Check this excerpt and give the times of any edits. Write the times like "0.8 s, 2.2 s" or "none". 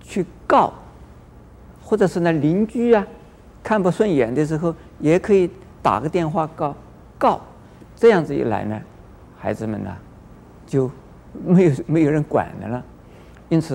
none